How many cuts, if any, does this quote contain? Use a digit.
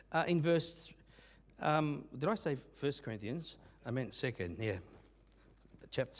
0